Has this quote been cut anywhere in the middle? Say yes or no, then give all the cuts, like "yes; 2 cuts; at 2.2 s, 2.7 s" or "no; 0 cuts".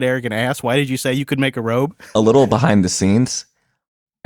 no; 0 cuts